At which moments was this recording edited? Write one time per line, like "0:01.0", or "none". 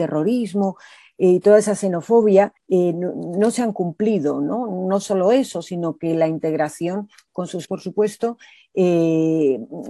0:02.6
0:07.6